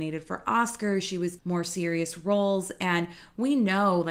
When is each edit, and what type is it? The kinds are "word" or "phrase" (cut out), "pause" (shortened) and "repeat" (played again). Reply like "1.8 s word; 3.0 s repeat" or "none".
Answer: 1.4 s word